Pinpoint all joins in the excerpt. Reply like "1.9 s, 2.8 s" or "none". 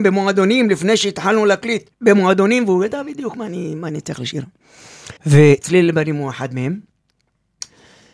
1.9 s, 5.2 s